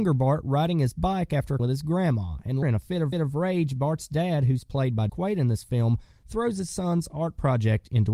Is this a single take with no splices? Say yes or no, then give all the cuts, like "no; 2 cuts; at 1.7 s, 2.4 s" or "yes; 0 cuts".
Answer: no; 4 cuts; at 1.6 s, 2.6 s, 3.1 s, 5.1 s